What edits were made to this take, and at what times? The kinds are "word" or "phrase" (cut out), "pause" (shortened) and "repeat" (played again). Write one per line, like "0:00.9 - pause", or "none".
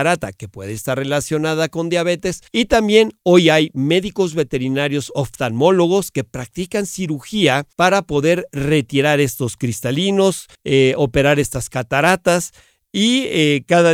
0:02.5 - pause
0:07.7 - pause
0:10.5 - pause